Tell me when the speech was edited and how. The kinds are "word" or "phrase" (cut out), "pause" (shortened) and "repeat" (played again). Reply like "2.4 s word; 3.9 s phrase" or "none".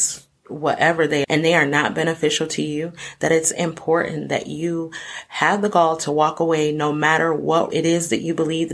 1.2 s word; 7.7 s word

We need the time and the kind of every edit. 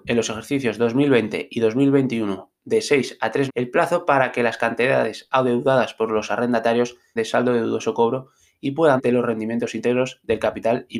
3.5 s word; 7.2 s phrase; 9.0 s word

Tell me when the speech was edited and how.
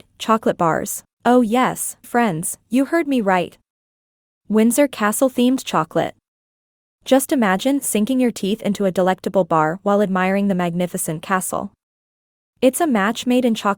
1.1 s pause; 2.0 s word

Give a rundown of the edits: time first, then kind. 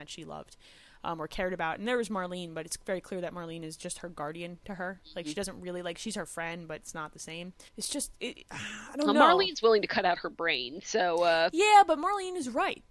7.7 s pause; 8.2 s pause

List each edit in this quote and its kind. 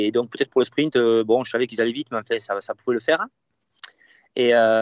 none

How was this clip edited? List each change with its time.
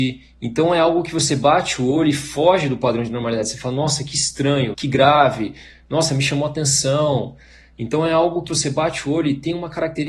4.7 s word; 8.5 s word

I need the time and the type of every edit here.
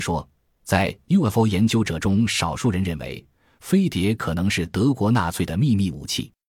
none

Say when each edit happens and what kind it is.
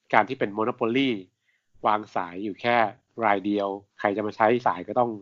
none

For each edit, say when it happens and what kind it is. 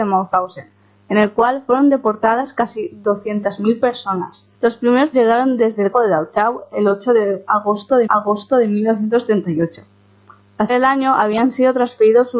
4.5 s pause; 5.1 s word; 5.9 s word; 8.1 s repeat; 10.7 s word

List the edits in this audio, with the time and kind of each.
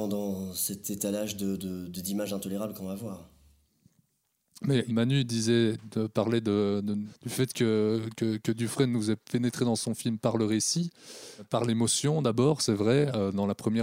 none

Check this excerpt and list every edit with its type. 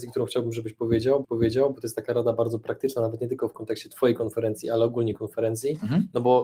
1.2 s repeat

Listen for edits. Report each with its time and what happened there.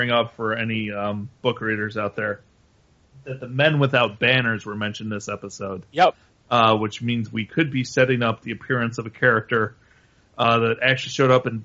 1.4 s pause

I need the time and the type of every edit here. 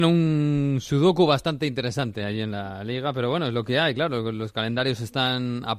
none

